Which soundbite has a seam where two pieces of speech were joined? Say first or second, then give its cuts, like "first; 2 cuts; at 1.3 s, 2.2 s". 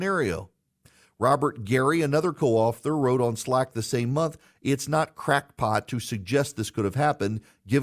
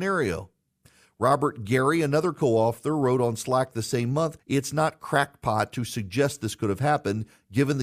second; 1 cut; at 4.4 s